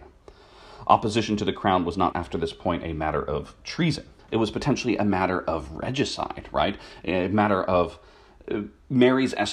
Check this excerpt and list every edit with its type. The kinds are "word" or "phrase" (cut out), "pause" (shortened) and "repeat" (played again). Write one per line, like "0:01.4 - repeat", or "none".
0:02.1 - word
0:04.2 - pause